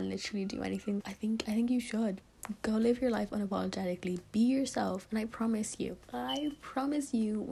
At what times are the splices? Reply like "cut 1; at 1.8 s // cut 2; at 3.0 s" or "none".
cut 1; at 1.0 s